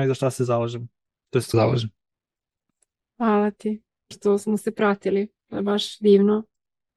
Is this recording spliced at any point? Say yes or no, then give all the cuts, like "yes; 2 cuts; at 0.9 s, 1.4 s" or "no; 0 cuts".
yes; 3 cuts; at 1.5 s, 4.1 s, 5.4 s